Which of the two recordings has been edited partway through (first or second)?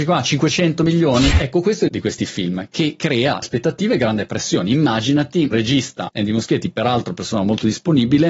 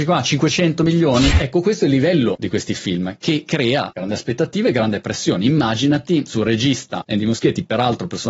first